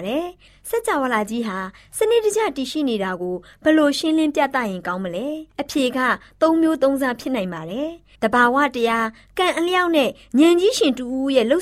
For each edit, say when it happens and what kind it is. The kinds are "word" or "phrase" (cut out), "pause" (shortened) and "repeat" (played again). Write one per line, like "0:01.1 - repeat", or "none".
0:08.1 - pause